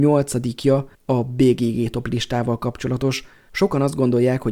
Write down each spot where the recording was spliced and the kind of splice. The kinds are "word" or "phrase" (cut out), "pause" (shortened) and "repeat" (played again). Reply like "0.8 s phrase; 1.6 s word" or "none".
0.9 s pause